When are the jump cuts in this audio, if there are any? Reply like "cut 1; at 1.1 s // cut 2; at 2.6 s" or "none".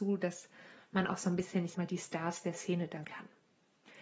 cut 1; at 1.7 s // cut 2; at 3.0 s

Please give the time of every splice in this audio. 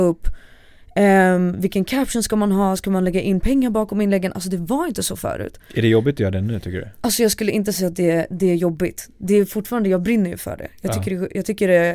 none

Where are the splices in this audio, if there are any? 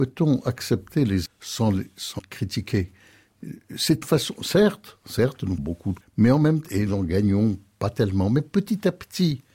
cut 1; at 1.3 s // cut 2; at 2.2 s // cut 3; at 4.0 s // cut 4; at 5.6 s // cut 5; at 6.0 s // cut 6; at 6.9 s

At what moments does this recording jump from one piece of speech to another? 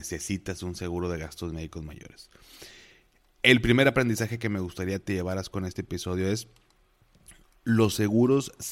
none

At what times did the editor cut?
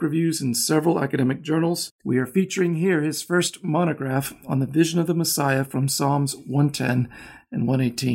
none

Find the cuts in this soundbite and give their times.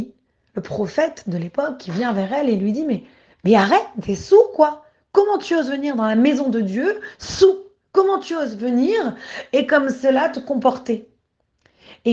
none

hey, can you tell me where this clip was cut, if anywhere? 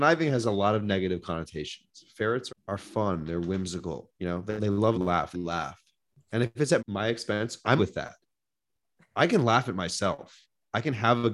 cut 1; at 2.5 s // cut 2; at 4.1 s // cut 3; at 4.6 s // cut 4; at 4.9 s // cut 5; at 5.3 s // cut 6; at 6.1 s // cut 7; at 6.8 s // cut 8; at 7.8 s

